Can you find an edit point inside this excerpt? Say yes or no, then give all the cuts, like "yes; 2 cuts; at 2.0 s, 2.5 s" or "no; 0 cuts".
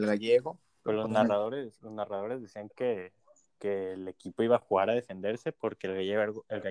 no; 0 cuts